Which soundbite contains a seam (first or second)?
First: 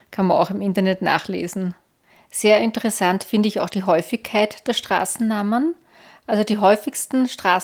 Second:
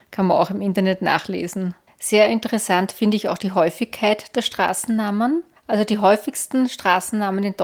second